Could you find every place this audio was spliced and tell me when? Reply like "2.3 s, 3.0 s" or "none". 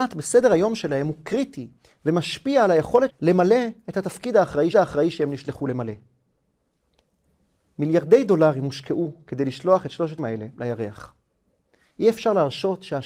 3.1 s, 4.7 s, 10.2 s